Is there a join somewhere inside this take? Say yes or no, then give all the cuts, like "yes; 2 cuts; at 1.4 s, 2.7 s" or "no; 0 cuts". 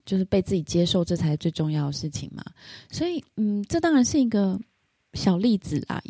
no; 0 cuts